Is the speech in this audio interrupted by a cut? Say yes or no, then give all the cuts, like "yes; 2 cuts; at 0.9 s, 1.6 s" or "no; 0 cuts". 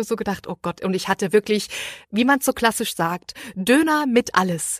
no; 0 cuts